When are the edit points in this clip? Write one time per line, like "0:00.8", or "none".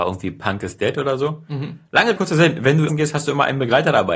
0:02.2
0:02.9